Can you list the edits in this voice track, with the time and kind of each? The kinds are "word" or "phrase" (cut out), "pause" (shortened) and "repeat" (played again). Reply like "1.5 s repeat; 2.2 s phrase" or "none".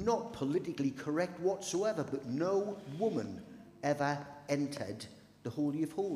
none